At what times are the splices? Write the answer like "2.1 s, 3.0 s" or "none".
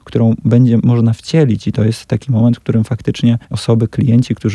3.4 s

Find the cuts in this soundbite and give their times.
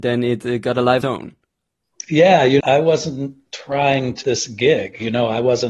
1.0 s, 2.6 s, 4.2 s

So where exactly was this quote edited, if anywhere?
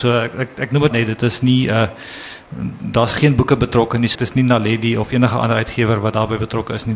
0.9 s, 4.1 s

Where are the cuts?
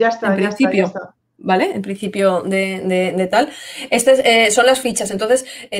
none

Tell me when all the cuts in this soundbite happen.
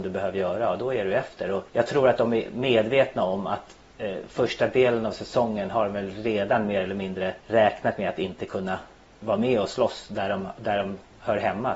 1.7 s, 7.4 s

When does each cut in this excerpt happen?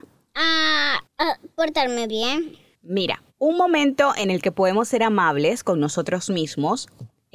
3.3 s

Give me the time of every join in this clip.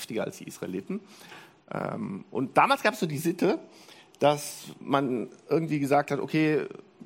none

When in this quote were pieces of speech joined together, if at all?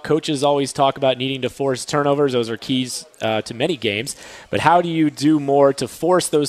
none

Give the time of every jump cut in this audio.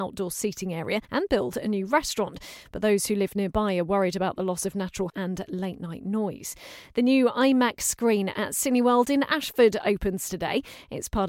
1.0 s, 5.1 s

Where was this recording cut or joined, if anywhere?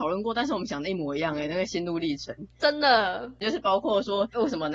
3.4 s

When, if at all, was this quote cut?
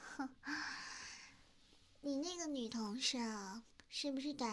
none

